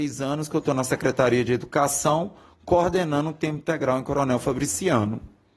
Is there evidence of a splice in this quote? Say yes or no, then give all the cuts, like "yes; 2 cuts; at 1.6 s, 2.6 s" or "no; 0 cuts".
no; 0 cuts